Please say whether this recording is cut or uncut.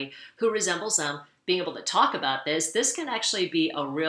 uncut